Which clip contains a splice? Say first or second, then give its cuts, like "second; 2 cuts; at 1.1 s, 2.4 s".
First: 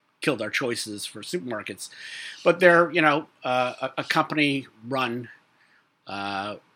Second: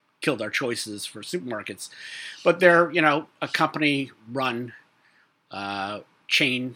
second; 1 cut; at 3.4 s